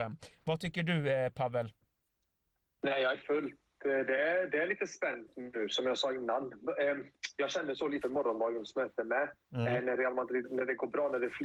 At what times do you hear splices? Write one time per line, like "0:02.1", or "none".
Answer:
0:03.1
0:08.0
0:10.4